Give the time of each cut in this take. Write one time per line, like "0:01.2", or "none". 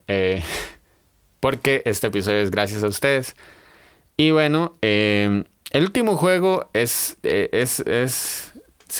none